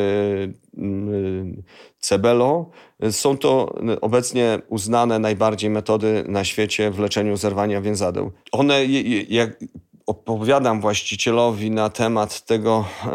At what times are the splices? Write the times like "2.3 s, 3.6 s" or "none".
none